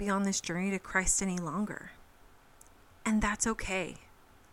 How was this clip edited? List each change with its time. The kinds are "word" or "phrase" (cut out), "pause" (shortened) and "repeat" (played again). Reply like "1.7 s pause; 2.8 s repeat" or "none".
none